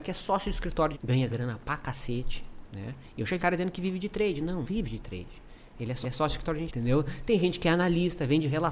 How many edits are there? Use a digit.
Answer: 5